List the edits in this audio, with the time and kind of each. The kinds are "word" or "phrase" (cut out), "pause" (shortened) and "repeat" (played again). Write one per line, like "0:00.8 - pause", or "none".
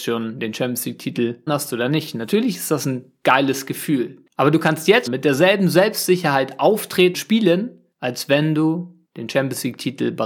0:01.5 - word
0:04.3 - pause
0:05.1 - word
0:07.1 - word
0:07.9 - pause
0:09.0 - pause